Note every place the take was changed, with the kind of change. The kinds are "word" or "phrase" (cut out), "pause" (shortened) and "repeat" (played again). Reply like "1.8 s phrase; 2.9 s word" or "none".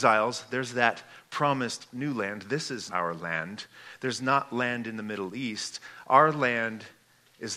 2.9 s word